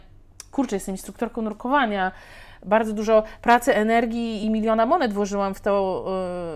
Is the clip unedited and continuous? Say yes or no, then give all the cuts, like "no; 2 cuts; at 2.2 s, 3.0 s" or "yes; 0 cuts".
yes; 0 cuts